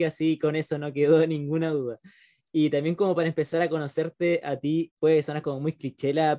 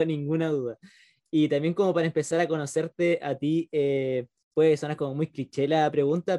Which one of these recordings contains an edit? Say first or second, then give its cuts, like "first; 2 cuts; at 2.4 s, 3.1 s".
first; 1 cut; at 4.9 s